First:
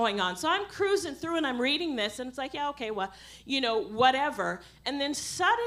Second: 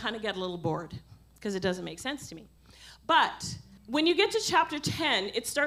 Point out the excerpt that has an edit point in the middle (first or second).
second